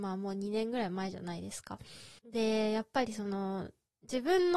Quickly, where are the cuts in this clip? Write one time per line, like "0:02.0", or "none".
0:02.2

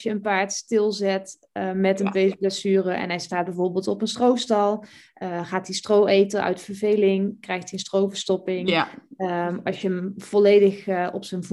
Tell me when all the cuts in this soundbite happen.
none

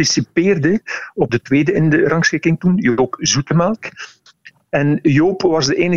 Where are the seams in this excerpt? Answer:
0:01.3

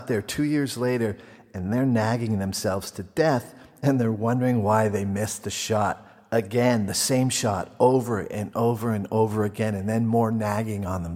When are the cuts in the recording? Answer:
none

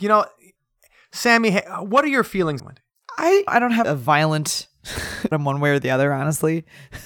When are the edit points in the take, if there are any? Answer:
0:02.6
0:03.5
0:03.8
0:05.3

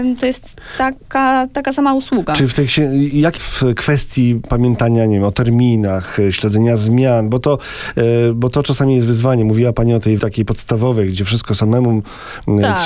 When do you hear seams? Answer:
0:03.4
0:10.2

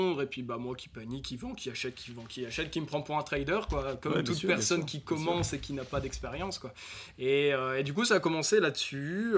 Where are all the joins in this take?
none

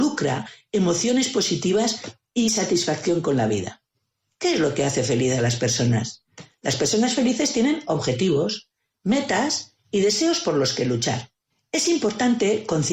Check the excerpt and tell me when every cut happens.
none

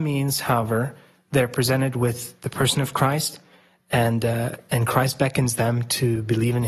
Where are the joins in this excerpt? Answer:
none

